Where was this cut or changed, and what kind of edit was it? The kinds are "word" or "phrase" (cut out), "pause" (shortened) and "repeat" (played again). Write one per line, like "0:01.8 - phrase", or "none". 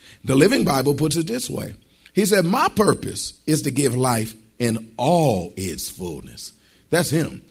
none